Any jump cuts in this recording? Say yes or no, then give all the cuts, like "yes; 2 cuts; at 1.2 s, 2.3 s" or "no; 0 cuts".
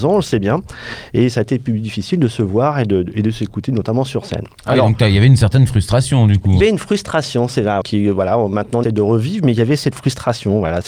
yes; 3 cuts; at 6.6 s, 7.8 s, 8.8 s